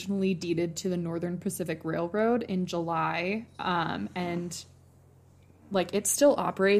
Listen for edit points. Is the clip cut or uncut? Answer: uncut